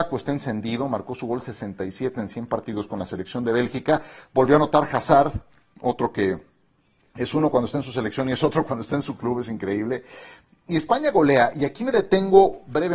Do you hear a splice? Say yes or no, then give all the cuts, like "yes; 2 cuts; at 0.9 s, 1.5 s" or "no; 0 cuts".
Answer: no; 0 cuts